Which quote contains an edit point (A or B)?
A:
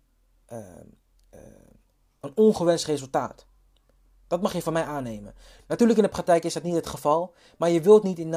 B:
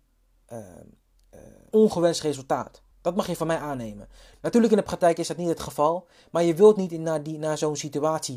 B